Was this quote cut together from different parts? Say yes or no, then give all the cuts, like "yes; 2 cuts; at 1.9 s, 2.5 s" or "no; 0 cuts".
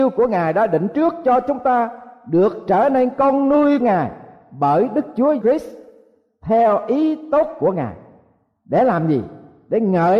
yes; 2 cuts; at 3.8 s, 5.4 s